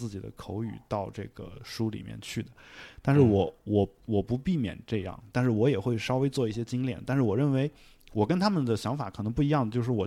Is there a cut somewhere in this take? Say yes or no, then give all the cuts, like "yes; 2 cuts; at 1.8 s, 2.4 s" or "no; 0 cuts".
no; 0 cuts